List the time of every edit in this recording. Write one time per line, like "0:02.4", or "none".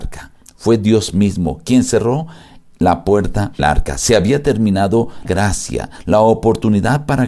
0:03.6
0:05.2